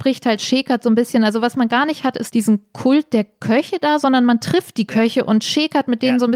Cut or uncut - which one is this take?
uncut